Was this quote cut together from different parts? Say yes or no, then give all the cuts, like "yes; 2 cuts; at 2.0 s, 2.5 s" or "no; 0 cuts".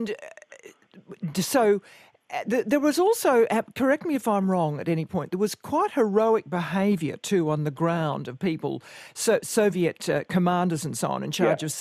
no; 0 cuts